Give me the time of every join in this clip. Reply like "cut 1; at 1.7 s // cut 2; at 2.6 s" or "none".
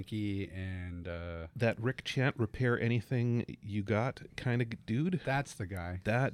none